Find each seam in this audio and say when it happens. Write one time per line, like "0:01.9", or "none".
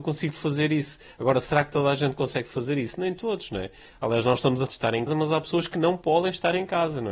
0:04.7
0:05.1

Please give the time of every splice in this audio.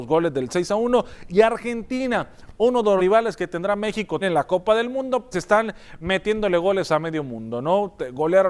0:03.0
0:04.2
0:05.3

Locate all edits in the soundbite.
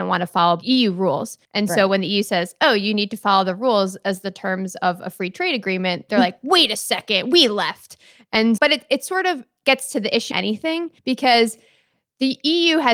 0:01.4
0:08.6
0:10.3
0:11.0

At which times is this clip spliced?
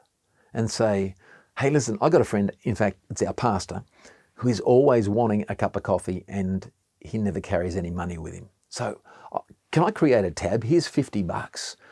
none

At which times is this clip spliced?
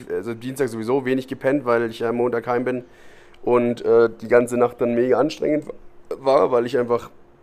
none

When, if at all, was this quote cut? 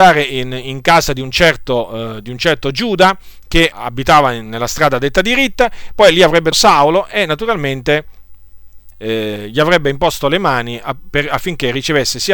0:03.7
0:06.5
0:08.9

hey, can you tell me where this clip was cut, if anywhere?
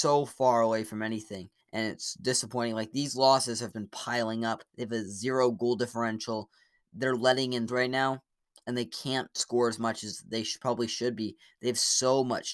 0:01.6
0:03.7
0:04.7
0:07.7

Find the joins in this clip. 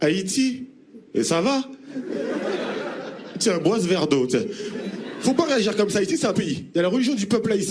0:01.1
0:06.3

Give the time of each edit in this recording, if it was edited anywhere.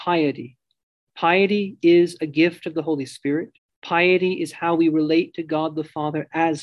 0:03.6

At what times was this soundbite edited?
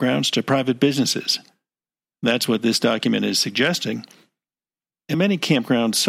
0:05.1

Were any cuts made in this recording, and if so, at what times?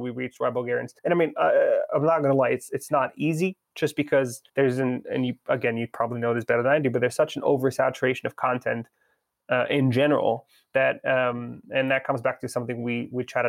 0:01.0
0:04.5

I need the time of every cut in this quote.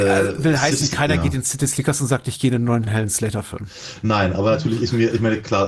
0:02.9

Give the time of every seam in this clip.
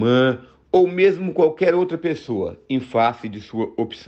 none

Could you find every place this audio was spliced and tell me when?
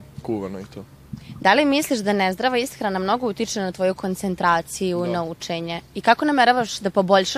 0:05.9

